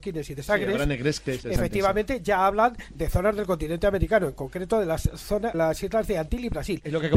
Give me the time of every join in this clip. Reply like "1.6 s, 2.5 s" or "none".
1.4 s, 3.0 s, 5.5 s